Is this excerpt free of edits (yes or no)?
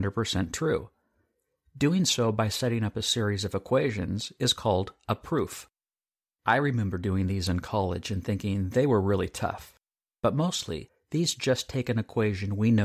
yes